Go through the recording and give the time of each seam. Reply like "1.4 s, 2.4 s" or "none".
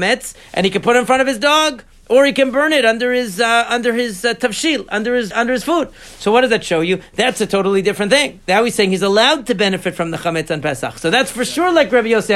5.3 s